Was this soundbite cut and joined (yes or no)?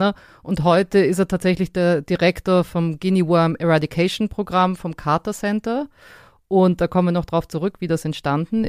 no